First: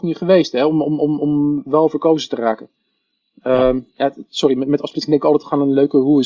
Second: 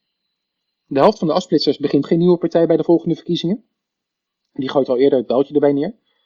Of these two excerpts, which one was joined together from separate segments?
second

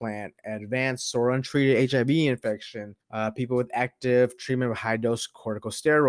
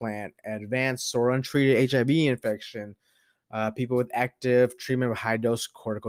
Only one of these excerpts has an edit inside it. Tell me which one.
first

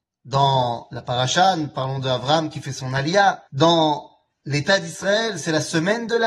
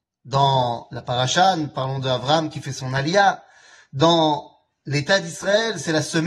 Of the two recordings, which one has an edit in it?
first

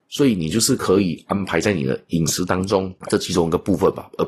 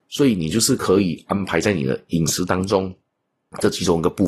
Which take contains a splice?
first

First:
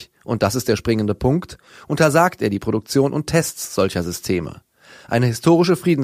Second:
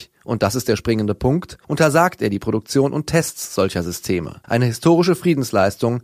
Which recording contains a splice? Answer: second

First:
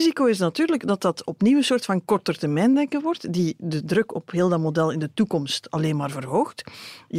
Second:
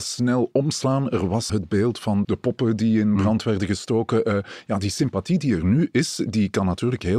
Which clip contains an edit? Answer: second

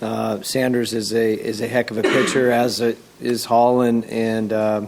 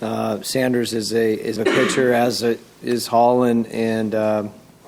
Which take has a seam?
second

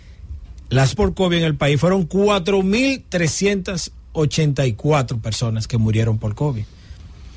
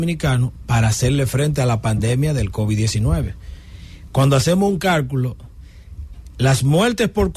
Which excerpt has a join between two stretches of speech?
first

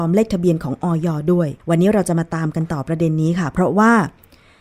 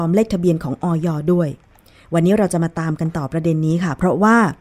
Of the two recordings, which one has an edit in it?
first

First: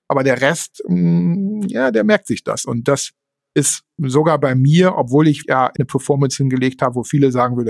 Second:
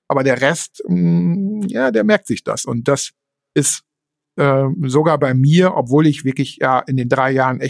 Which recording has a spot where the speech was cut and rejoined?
first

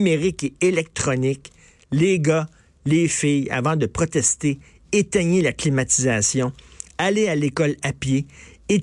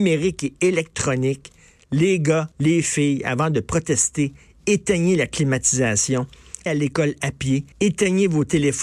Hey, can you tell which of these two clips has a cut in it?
second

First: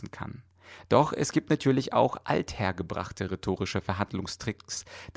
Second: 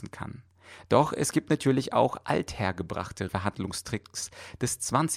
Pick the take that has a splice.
second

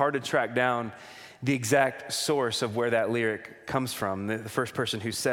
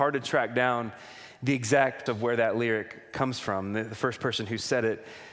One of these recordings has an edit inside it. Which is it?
second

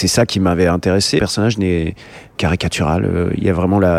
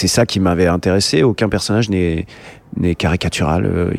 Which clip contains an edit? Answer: first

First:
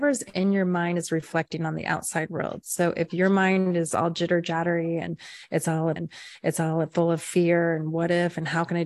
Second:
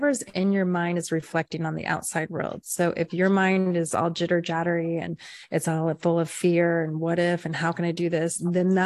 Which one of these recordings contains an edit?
first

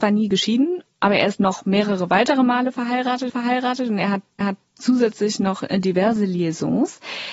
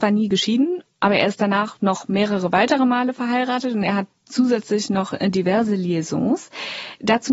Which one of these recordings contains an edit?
first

